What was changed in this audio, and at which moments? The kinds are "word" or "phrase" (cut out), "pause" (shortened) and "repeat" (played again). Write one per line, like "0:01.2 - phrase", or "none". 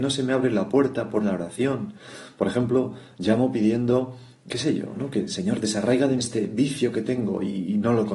0:01.2 - phrase
0:04.5 - word
0:06.2 - word